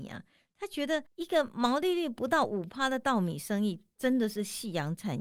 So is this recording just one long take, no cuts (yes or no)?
no